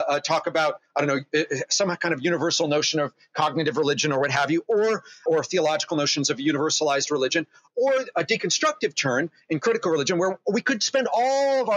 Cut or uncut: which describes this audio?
uncut